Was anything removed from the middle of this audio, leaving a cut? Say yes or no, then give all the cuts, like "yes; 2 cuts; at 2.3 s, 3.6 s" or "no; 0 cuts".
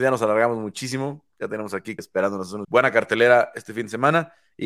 yes; 2 cuts; at 2.0 s, 2.6 s